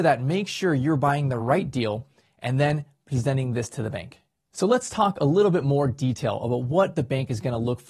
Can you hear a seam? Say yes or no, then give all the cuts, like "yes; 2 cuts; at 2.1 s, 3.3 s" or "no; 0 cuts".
no; 0 cuts